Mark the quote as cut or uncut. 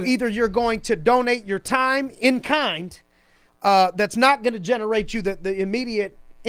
uncut